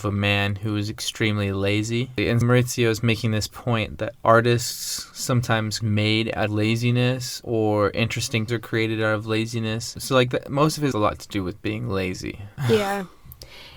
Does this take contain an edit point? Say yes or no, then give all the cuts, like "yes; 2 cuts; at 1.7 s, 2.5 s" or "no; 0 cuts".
yes; 5 cuts; at 2.4 s, 5.8 s, 6.5 s, 8.5 s, 10.9 s